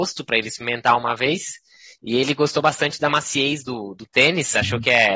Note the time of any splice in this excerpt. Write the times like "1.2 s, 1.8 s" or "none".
none

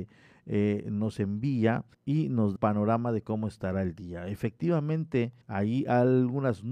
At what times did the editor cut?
1.9 s, 2.6 s, 5.4 s

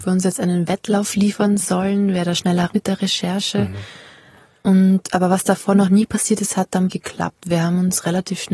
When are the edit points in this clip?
2.7 s, 6.9 s

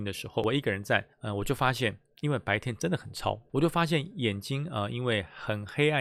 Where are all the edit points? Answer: 1.1 s

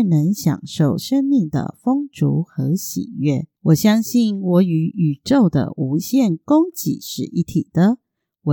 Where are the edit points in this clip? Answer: 3.6 s

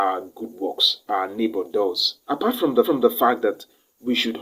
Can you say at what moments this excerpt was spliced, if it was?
1.1 s, 2.2 s, 2.8 s

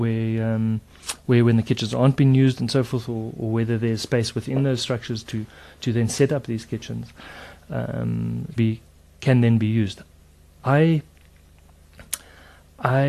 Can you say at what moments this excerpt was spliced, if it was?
3.4 s, 8.6 s

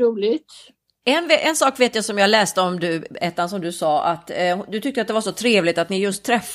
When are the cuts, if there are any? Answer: none

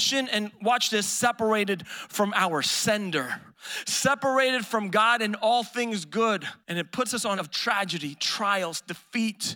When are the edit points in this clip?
6.6 s, 7.4 s

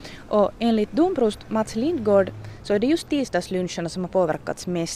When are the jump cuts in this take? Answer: none

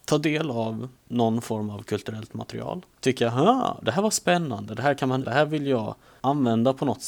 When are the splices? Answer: 1.0 s, 2.9 s, 5.2 s

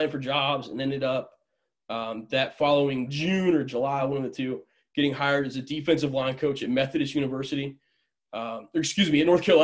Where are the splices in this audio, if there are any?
none

